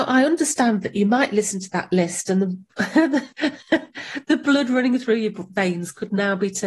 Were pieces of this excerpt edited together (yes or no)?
no